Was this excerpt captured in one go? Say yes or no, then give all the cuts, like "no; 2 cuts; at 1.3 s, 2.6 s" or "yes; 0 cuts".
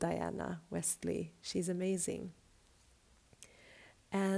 yes; 0 cuts